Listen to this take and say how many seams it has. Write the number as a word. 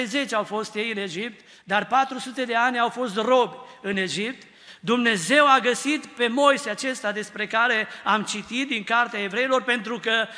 zero